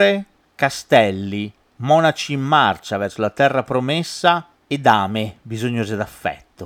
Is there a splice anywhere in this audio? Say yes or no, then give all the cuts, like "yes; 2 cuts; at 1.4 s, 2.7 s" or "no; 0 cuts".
yes; 1 cut; at 1.6 s